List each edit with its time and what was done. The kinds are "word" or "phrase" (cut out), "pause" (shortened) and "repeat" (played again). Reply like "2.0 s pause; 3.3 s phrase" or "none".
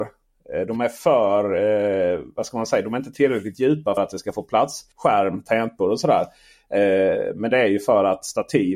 4.0 s word; 4.9 s pause